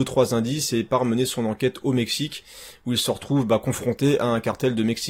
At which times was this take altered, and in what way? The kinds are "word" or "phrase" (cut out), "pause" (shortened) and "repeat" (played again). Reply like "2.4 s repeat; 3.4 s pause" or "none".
none